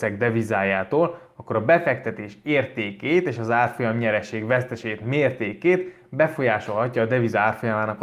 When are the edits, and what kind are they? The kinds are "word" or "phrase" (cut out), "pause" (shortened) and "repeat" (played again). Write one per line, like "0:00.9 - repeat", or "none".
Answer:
none